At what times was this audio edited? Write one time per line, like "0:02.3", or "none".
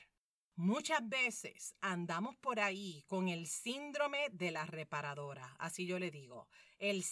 none